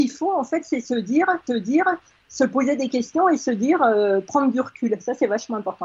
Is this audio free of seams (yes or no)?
no